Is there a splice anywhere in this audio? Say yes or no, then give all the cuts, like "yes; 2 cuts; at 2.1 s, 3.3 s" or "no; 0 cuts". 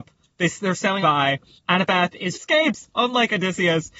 yes; 3 cuts; at 1.0 s, 1.6 s, 2.3 s